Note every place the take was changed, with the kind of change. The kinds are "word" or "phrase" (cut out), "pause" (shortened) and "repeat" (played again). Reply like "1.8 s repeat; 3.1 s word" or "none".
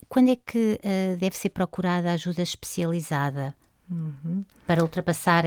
none